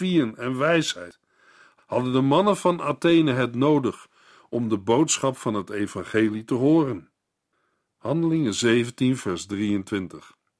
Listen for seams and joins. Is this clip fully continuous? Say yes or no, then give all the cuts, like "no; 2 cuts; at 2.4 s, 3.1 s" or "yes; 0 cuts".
yes; 0 cuts